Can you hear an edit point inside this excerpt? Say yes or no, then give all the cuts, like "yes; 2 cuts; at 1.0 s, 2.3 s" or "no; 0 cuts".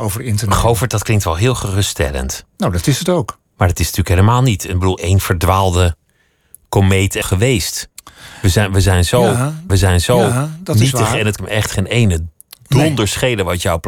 yes; 4 cuts; at 5.0 s, 7.2 s, 9.7 s, 11.4 s